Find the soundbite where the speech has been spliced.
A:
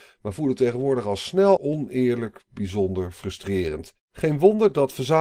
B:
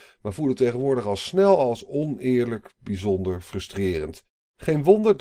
A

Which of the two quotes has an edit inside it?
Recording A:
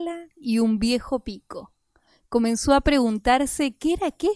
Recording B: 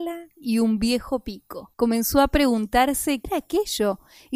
B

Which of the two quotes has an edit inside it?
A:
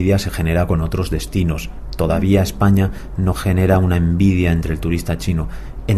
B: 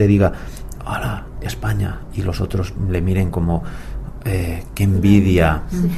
B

